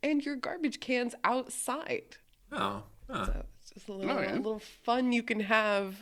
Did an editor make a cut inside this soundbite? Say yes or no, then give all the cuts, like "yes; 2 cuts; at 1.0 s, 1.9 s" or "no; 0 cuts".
no; 0 cuts